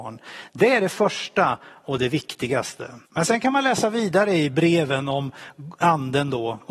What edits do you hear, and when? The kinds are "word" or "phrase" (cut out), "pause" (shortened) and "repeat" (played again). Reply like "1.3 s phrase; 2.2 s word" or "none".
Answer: 3.1 s pause